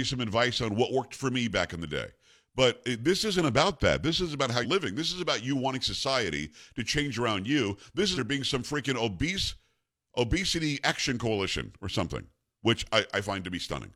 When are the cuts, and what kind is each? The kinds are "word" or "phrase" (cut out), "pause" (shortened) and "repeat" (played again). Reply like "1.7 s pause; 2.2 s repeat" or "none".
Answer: 4.6 s word; 8.2 s phrase